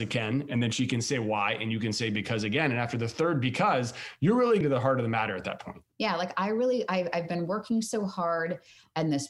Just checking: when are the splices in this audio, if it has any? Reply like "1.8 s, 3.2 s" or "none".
4.6 s